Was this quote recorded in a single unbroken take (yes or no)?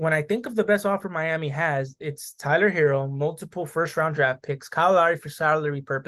yes